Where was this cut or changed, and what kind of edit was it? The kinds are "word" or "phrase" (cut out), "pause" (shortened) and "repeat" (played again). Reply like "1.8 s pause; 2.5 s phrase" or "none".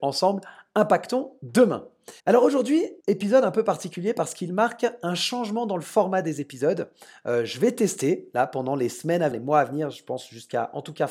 2.2 s pause; 3.0 s pause; 9.3 s word